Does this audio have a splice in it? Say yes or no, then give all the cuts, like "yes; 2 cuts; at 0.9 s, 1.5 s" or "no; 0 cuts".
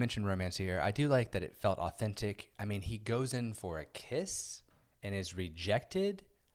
no; 0 cuts